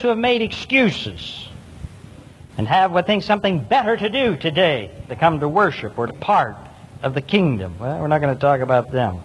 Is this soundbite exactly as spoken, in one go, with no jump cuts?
no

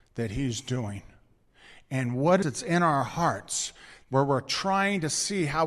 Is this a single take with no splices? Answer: no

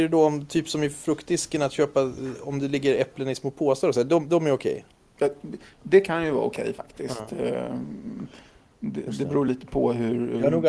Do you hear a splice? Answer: no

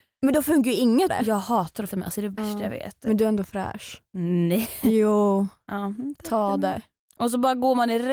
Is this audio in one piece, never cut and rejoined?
no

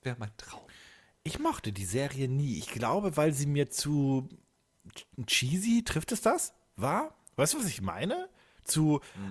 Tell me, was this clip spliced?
no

